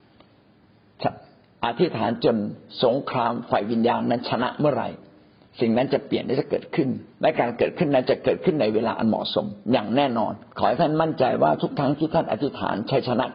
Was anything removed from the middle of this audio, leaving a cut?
yes; 3 cuts; at 7.1 s, 9.6 s, 10.5 s

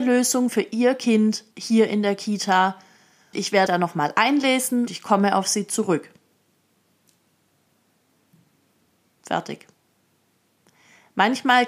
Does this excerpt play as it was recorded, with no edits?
no; 4 cuts; at 1.5 s, 3.3 s, 3.7 s, 4.9 s

